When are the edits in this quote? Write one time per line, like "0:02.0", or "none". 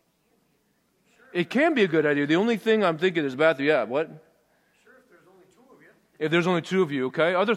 none